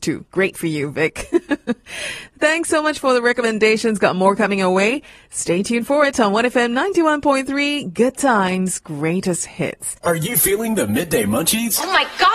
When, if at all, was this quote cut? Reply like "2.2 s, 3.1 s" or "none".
none